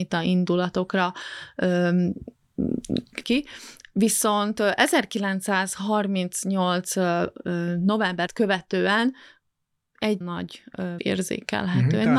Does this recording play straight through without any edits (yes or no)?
no